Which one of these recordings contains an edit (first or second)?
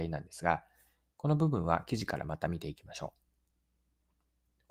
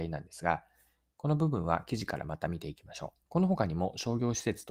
second